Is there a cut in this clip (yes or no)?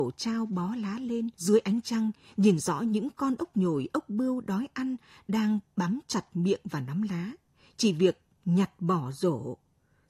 yes